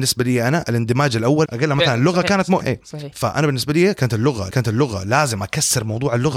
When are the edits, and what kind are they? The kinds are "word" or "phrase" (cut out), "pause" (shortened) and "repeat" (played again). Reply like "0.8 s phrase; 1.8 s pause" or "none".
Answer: 1.4 s word; 2.6 s word; 4.5 s repeat